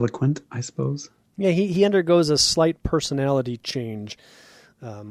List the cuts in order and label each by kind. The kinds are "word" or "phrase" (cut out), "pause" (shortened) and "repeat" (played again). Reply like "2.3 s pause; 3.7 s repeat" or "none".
none